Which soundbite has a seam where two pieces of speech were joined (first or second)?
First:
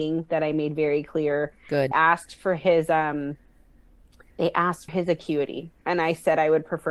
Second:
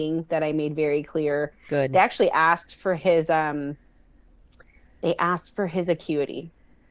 first